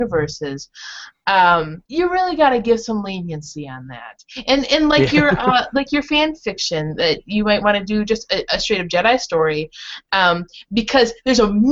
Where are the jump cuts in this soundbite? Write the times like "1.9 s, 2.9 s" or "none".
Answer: 1.9 s